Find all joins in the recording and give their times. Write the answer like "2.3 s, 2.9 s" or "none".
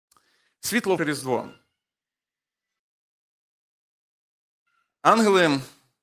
1.0 s